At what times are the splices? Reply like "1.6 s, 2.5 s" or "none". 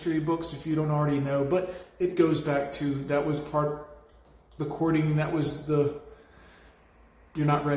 none